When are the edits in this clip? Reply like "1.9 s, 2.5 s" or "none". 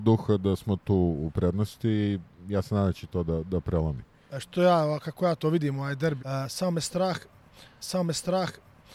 4.4 s, 6.2 s, 7.8 s